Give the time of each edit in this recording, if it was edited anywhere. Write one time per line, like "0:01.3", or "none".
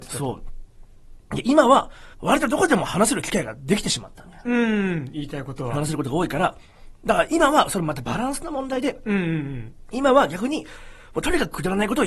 0:02.1